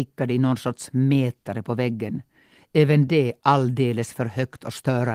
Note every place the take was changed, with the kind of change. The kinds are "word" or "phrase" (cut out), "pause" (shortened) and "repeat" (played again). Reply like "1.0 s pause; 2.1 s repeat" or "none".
none